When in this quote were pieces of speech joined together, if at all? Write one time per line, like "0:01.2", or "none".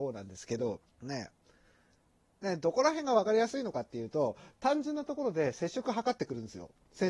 0:00.9